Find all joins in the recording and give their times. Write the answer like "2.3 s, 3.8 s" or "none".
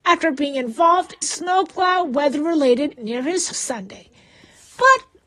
1.2 s, 3.0 s, 3.5 s